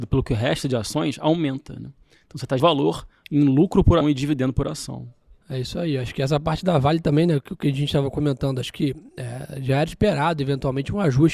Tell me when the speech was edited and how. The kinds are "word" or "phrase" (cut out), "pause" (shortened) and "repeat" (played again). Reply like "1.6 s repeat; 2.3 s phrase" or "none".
2.6 s word; 4.0 s word